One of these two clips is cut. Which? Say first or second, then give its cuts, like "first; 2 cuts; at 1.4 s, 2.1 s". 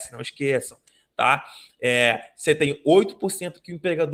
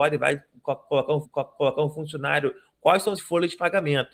second; 2 cuts; at 1.2 s, 3.2 s